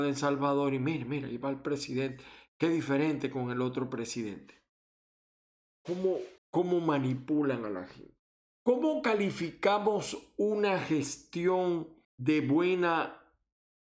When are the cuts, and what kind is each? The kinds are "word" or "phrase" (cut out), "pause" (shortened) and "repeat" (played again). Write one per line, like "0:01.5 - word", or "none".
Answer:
0:06.4 - pause
0:08.2 - pause
0:12.0 - pause